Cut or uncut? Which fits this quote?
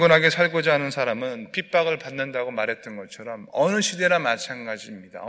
uncut